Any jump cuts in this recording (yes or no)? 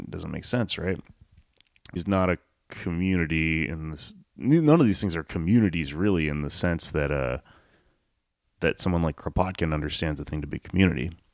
yes